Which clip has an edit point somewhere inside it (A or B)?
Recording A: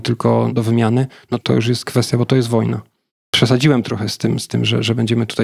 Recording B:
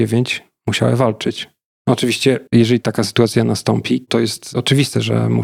B